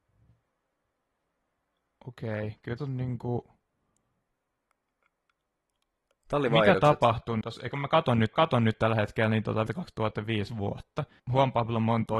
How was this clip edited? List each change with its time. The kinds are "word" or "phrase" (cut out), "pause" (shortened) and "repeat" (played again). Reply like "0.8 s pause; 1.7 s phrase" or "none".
2.8 s word; 7.4 s phrase; 8.3 s repeat; 9.7 s word; 11.2 s word